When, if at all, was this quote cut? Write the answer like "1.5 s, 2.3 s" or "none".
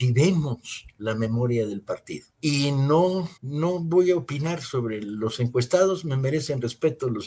2.3 s, 3.4 s